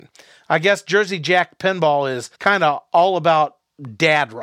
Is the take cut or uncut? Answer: cut